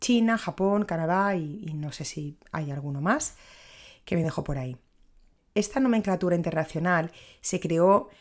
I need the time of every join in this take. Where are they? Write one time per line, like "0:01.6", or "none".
none